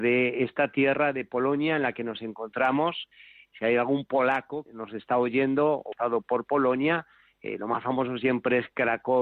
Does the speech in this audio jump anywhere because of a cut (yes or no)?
yes